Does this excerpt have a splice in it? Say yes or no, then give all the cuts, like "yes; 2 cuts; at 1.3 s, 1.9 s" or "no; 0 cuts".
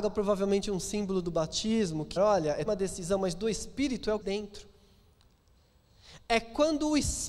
yes; 3 cuts; at 2.2 s, 2.7 s, 4.2 s